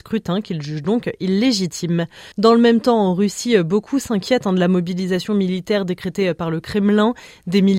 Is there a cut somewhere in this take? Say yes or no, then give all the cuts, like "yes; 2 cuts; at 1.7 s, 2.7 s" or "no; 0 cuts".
yes; 1 cut; at 2.3 s